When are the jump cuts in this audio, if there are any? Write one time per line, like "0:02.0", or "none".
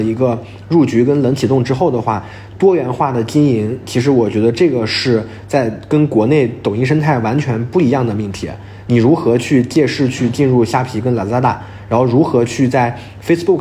none